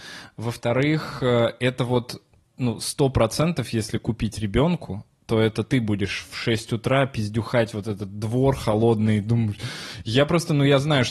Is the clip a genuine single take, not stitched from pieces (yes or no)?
no